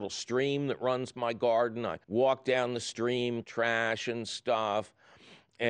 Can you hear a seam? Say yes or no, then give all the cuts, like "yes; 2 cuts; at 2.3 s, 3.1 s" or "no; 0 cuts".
yes; 3 cuts; at 1.1 s, 2.0 s, 3.4 s